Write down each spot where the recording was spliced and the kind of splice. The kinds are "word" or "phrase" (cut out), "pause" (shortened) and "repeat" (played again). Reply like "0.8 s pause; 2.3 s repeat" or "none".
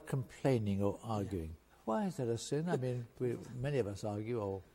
1.6 s pause

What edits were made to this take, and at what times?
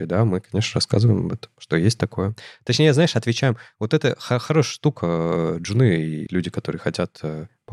6.3 s word

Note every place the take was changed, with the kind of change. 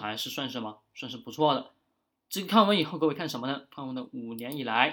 none

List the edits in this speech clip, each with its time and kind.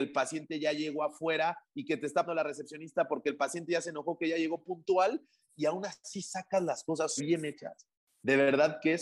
2.2 s word; 7.2 s word

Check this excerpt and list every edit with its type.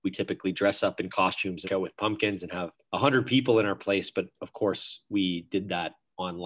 1.6 s word; 2.7 s pause

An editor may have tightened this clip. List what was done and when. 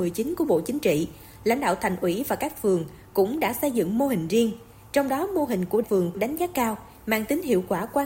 6.1 s phrase

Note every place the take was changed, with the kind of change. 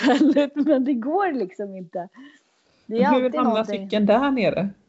none

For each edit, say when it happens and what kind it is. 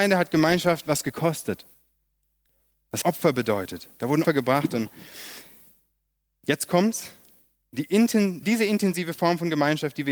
3.0 s word; 4.2 s word; 8.4 s word

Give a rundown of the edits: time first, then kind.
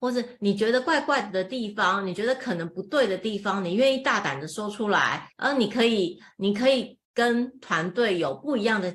5.3 s pause; 7.0 s pause

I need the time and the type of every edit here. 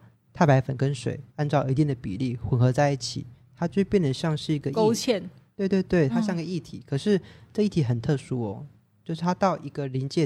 1.3 s pause

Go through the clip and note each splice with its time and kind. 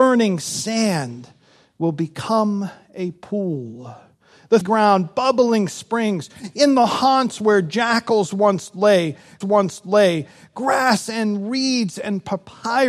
4.6 s word; 9.4 s repeat

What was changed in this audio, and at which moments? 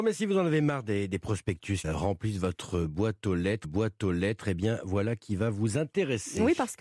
1.8 s word; 3.6 s repeat

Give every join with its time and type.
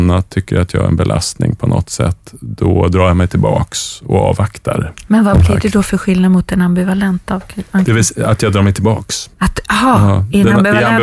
none

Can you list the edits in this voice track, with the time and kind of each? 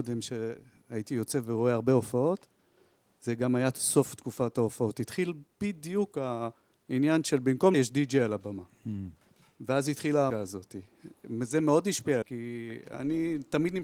7.7 s word; 10.3 s word; 12.2 s word

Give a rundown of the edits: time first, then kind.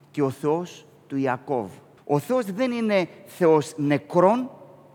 2.0 s pause

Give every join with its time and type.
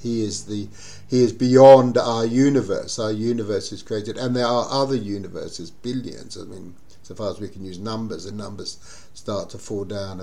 8.3 s word

